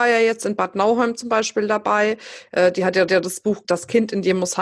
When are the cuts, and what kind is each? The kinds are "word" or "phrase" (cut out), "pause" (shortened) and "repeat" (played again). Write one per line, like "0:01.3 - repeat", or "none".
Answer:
0:03.1 - repeat
0:03.6 - word